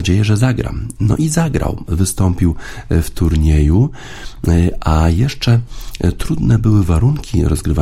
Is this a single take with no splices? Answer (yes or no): yes